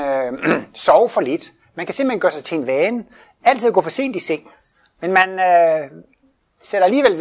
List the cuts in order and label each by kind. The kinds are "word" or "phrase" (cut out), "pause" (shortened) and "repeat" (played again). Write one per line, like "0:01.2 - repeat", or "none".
none